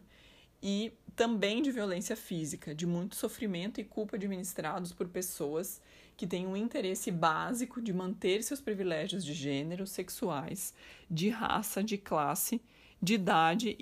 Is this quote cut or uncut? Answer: uncut